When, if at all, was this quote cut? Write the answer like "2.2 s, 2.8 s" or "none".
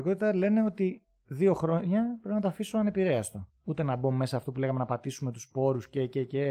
3.6 s